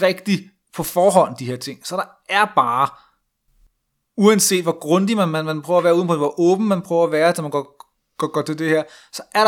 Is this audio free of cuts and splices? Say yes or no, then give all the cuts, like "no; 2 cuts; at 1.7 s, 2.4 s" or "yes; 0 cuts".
yes; 0 cuts